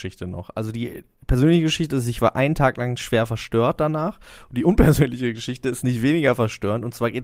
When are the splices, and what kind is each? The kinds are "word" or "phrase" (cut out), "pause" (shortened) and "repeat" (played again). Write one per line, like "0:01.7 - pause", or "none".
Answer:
none

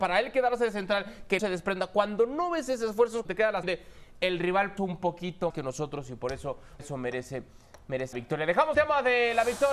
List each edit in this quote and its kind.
0:01.4 - word
0:03.3 - word
0:03.6 - word
0:04.8 - word
0:05.5 - word
0:06.8 - word
0:08.1 - word
0:08.7 - word

